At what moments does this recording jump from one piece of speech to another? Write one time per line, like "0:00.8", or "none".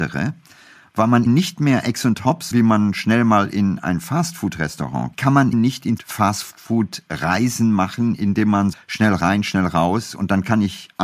0:01.3
0:02.5
0:05.1
0:05.5
0:06.0
0:08.7